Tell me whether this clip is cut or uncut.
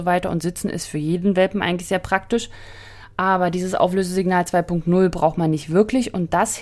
uncut